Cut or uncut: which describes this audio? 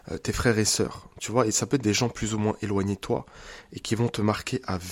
uncut